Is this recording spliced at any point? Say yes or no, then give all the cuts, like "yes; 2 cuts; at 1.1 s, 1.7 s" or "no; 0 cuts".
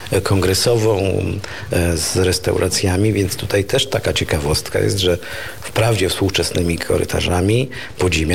no; 0 cuts